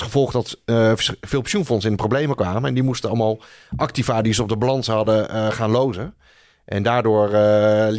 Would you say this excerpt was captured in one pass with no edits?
yes; 0 cuts

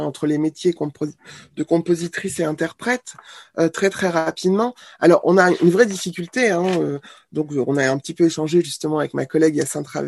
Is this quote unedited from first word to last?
yes; 0 cuts

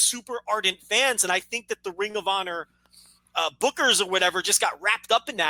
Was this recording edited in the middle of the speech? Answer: no; 0 cuts

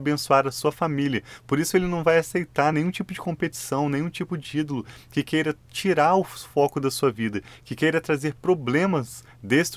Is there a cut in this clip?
no; 0 cuts

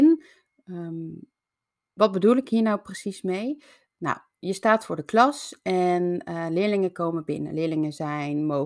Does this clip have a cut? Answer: no; 0 cuts

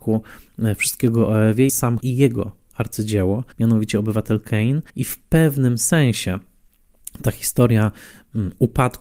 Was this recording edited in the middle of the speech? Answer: yes; 4 cuts; at 1.7 s, 2.0 s, 3.5 s, 4.9 s

